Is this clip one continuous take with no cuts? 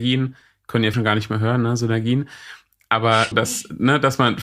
no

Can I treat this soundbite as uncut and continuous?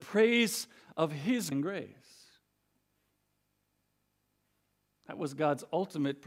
no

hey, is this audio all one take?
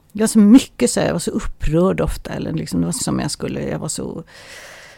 no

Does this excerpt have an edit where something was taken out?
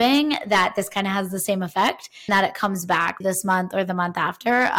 yes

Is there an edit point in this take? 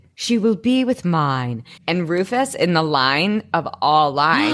yes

